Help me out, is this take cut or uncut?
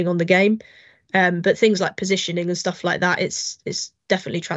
uncut